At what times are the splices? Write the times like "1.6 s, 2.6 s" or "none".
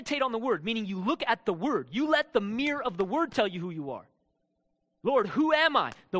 none